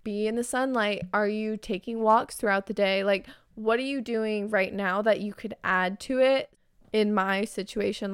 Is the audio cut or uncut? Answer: uncut